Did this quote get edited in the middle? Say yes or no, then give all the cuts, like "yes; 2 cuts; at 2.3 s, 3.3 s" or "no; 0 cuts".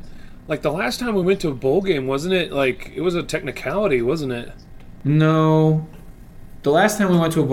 no; 0 cuts